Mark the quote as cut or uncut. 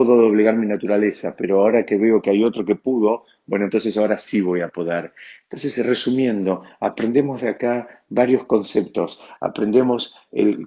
uncut